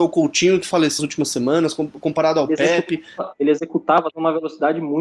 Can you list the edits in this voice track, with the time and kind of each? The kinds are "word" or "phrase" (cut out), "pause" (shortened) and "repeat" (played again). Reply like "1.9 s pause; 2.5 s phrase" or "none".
1.0 s word; 4.1 s word

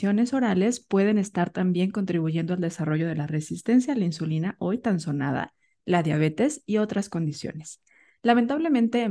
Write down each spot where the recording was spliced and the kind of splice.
none

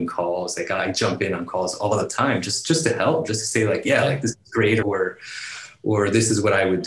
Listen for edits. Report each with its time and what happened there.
4.8 s word

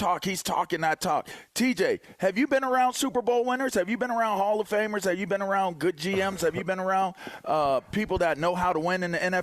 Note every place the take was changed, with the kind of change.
none

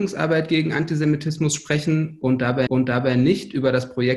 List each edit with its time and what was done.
2.7 s repeat

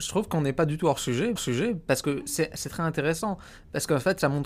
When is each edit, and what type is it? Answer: 1.4 s repeat

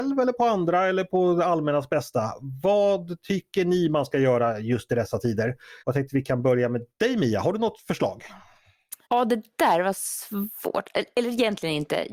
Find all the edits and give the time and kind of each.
5.8 s pause; 6.9 s pause; 9.0 s pause

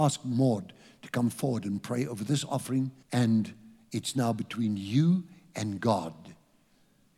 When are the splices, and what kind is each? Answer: 3.0 s pause

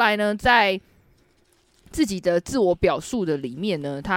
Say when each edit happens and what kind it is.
none

